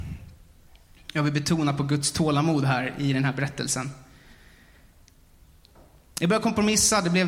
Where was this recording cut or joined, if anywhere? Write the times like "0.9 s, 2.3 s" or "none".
none